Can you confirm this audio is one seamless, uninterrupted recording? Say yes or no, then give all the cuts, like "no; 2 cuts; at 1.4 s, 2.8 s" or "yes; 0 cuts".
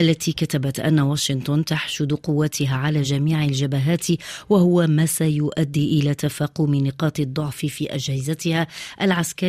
yes; 0 cuts